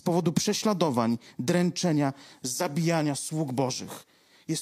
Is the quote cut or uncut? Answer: uncut